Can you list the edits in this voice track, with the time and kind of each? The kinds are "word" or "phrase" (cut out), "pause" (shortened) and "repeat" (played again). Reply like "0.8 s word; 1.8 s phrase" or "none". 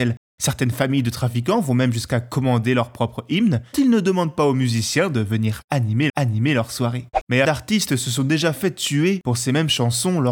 3.7 s word; 6.1 s repeat; 7.4 s phrase